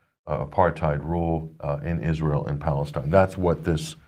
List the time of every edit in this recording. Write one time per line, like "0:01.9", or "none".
none